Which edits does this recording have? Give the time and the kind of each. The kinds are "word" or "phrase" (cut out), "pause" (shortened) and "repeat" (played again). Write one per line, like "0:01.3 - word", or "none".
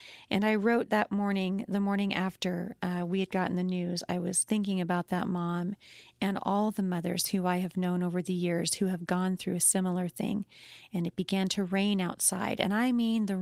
none